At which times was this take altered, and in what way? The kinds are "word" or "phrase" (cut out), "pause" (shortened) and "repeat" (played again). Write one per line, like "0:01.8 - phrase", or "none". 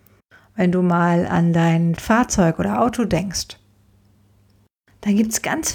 0:02.0 - word